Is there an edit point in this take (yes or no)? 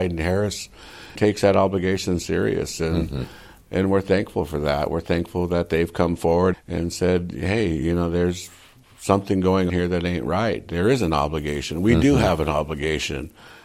yes